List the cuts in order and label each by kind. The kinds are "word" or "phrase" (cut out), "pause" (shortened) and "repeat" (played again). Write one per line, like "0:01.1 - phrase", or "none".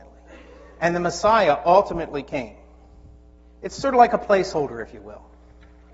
0:03.4 - pause